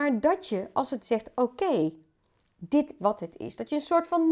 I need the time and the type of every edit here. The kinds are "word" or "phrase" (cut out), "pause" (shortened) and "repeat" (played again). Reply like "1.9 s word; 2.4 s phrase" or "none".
1.0 s word; 3.0 s word